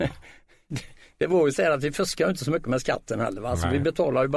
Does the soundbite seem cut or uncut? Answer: uncut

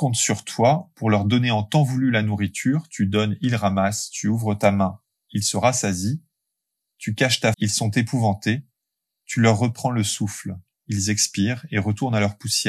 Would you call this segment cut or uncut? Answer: cut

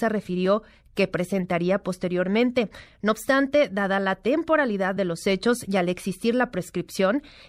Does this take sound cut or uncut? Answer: uncut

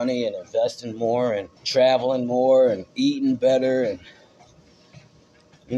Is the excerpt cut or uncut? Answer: cut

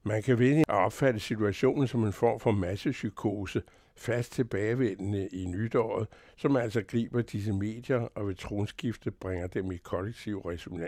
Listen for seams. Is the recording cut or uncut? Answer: uncut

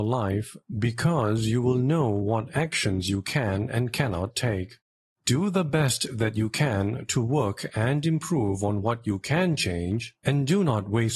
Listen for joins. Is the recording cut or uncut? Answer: uncut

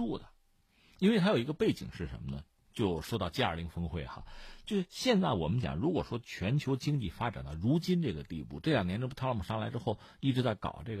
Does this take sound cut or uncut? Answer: uncut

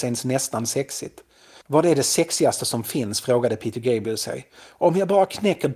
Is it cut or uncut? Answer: uncut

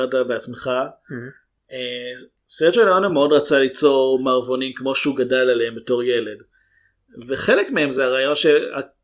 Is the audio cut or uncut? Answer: uncut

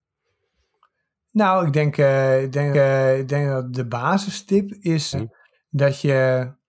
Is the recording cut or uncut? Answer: cut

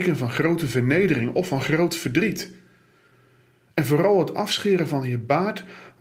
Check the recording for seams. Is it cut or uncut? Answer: uncut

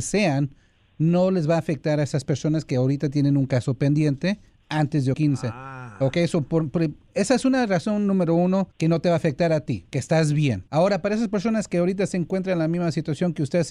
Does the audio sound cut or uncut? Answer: cut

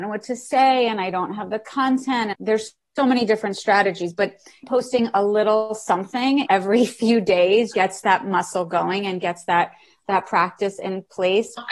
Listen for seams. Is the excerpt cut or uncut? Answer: cut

